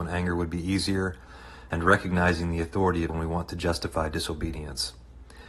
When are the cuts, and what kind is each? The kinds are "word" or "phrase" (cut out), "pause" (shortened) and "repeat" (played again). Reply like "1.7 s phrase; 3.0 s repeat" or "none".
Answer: 3.1 s word